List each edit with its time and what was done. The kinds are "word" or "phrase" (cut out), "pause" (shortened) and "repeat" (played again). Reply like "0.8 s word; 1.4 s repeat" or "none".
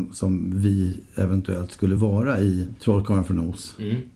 none

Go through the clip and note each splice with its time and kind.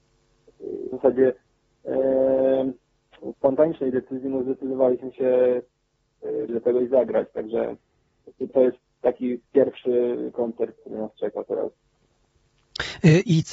0.9 s word; 6.5 s word; 8.5 s word; 9.5 s pause; 10.8 s word

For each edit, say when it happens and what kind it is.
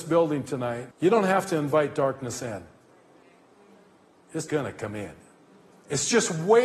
0.9 s pause; 4.5 s word

